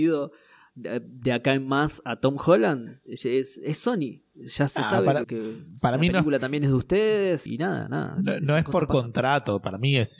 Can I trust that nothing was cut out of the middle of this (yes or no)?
no